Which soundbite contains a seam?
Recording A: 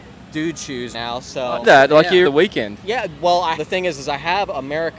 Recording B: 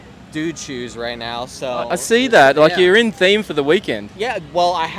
A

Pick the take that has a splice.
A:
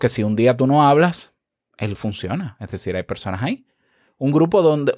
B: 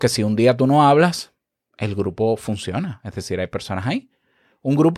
A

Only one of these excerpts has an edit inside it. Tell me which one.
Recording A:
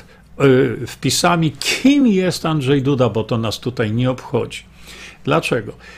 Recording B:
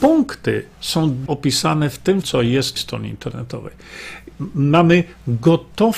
B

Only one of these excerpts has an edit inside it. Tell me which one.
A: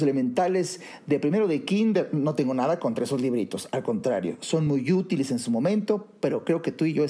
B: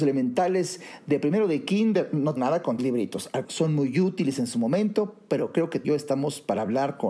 B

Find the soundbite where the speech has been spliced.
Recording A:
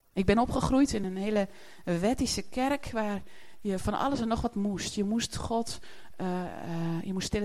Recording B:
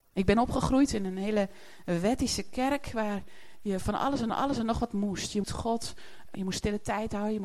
B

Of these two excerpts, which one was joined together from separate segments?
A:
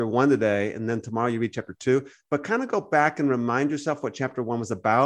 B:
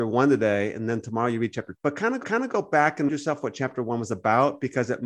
B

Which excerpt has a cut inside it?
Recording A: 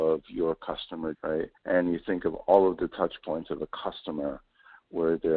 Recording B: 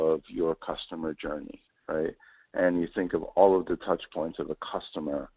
A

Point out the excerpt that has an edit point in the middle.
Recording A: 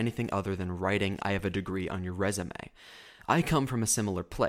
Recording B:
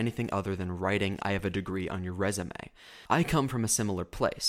B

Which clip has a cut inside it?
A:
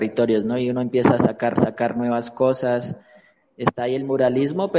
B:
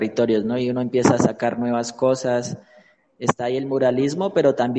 A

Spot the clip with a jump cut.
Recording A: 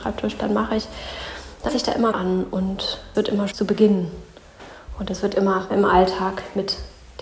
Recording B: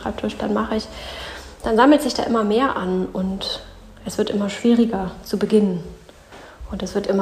A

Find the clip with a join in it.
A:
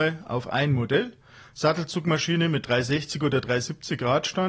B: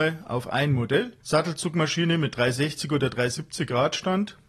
B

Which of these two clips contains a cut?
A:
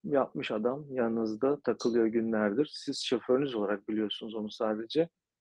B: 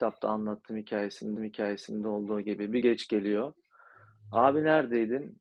B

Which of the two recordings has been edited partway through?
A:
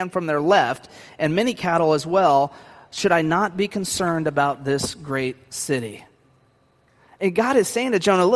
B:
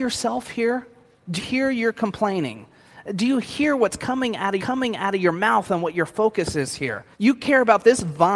B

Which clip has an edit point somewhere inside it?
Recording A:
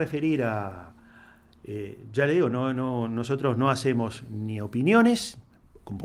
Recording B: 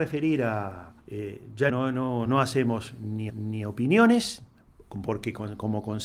B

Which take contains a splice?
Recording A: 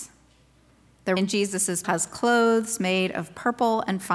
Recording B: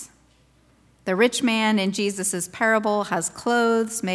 A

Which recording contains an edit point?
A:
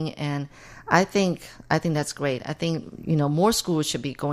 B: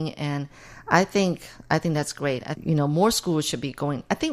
B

